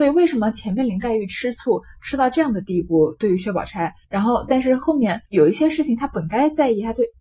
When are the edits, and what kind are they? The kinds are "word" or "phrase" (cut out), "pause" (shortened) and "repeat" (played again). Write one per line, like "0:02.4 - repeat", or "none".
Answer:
0:04.0 - pause
0:05.3 - pause